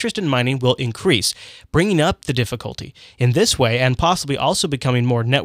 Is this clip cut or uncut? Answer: uncut